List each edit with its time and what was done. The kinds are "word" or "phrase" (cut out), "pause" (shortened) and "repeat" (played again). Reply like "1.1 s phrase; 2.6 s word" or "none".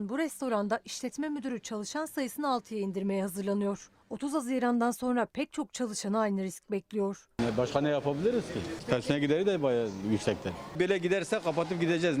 none